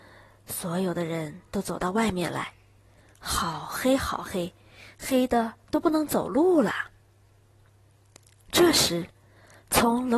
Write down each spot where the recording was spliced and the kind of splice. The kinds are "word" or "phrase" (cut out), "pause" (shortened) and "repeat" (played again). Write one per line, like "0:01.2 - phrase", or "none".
none